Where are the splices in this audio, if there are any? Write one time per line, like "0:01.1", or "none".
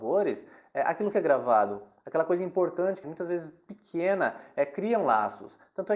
0:01.1
0:03.0